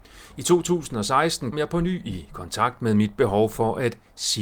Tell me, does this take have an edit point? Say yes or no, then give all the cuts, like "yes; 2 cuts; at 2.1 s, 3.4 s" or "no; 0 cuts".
yes; 1 cut; at 1.5 s